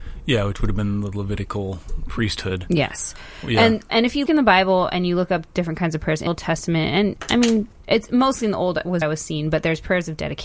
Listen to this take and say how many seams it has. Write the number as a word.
four